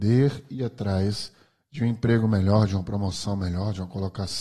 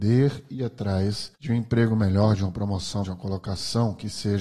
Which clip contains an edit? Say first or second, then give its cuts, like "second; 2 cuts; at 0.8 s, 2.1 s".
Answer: second; 2 cuts; at 1.4 s, 3.0 s